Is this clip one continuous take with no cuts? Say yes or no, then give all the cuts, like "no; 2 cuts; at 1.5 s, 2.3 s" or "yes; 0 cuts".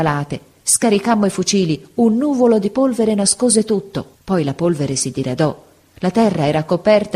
no; 1 cut; at 4.1 s